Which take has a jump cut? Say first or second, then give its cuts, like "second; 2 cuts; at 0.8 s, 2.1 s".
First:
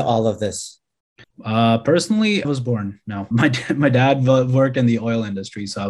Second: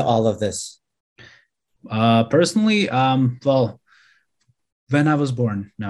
first; 3 cuts; at 1.2 s, 2.4 s, 3.3 s